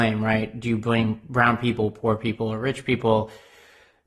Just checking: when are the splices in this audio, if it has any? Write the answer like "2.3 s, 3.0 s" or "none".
none